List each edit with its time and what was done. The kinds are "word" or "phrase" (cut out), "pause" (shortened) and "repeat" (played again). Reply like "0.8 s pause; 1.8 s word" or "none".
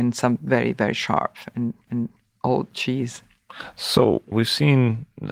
1.9 s repeat; 4.3 s word